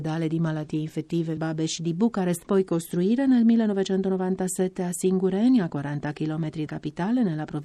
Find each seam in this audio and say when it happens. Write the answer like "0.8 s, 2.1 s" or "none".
1.4 s, 2.5 s, 6.7 s